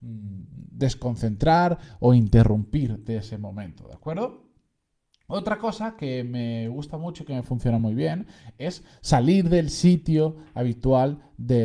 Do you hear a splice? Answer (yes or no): no